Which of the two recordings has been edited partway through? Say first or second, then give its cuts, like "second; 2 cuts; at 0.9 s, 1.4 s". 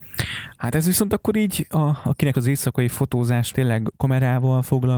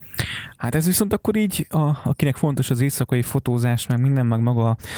first; 2 cuts; at 2.3 s, 3.5 s